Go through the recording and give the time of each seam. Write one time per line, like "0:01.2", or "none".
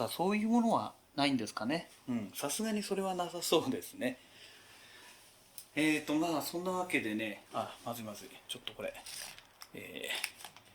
0:07.5